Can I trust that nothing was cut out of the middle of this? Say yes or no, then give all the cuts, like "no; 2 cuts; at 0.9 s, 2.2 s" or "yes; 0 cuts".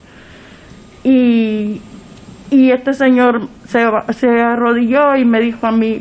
yes; 0 cuts